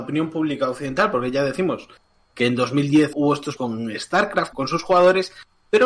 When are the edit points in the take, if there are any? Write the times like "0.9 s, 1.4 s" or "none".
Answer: 3.1 s, 3.6 s, 4.5 s